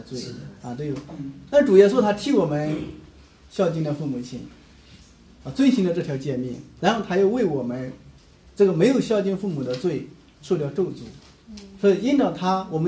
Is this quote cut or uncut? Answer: uncut